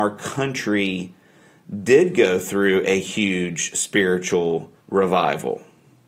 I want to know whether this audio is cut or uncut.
cut